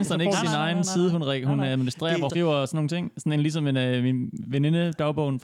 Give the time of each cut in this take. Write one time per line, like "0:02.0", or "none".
0:02.3